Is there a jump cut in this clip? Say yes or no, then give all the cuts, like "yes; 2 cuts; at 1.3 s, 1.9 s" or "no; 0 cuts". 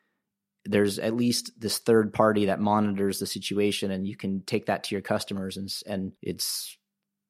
yes; 1 cut; at 6.2 s